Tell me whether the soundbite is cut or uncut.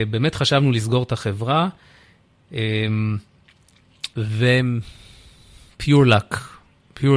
cut